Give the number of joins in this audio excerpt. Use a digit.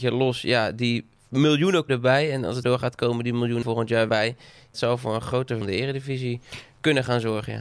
6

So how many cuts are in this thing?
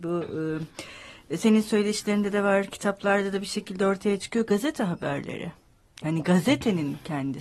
0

